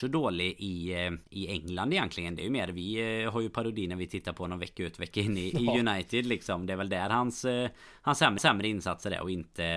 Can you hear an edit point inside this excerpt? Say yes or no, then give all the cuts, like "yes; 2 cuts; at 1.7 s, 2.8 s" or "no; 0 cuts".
yes; 2 cuts; at 1.2 s, 8.4 s